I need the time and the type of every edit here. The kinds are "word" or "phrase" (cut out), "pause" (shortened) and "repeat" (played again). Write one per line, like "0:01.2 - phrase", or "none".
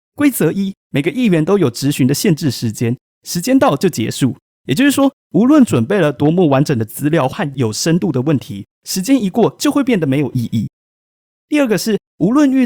none

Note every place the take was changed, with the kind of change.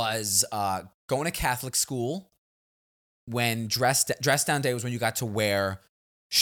none

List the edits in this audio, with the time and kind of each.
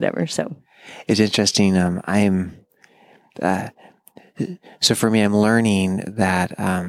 none

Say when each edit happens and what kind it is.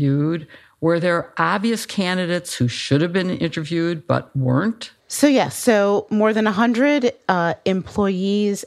0:05.0 - pause

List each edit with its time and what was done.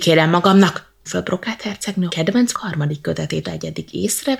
0:01.1 - word
0:02.1 - word
0:02.5 - word
0:03.4 - word

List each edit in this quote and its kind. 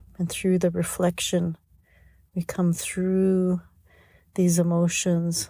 none

